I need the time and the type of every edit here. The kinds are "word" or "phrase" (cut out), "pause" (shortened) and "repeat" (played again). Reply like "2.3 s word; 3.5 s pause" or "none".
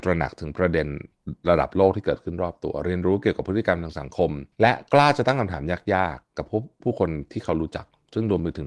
4.5 s pause